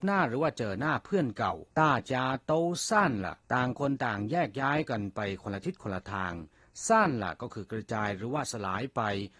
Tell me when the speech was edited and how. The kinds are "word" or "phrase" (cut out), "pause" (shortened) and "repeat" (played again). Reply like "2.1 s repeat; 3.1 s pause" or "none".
1.7 s pause; 3.4 s pause